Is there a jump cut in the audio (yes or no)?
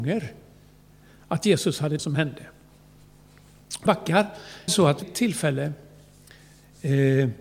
yes